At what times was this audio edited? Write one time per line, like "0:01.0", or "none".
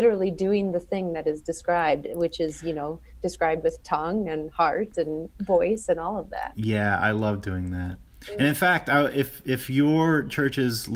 0:05.3